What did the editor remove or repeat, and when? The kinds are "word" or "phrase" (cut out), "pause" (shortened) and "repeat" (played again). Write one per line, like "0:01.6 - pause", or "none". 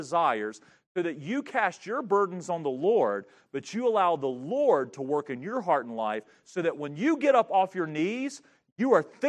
none